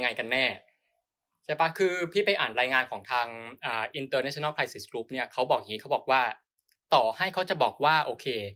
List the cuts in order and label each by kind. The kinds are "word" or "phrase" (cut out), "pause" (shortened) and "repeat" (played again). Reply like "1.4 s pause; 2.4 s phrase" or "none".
none